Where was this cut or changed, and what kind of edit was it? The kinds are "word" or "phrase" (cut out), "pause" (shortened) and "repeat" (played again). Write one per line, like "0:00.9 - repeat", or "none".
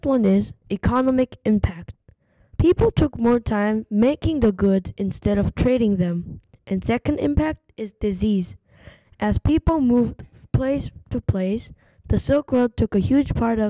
none